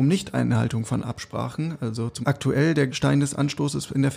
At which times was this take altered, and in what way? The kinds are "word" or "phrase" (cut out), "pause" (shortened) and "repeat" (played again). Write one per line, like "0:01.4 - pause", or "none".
0:02.2 - phrase
0:02.9 - word